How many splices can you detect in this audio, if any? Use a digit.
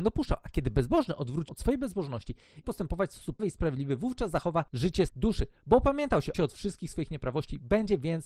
5